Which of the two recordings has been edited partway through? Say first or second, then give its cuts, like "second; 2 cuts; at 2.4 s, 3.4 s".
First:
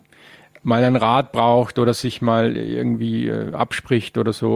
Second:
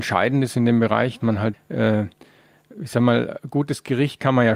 second; 2 cuts; at 1.2 s, 1.5 s